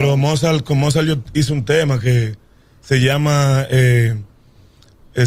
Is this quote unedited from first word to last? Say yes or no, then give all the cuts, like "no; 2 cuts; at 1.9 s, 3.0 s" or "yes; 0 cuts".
yes; 0 cuts